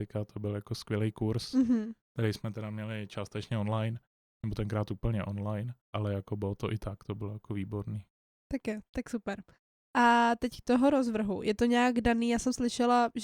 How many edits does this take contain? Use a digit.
3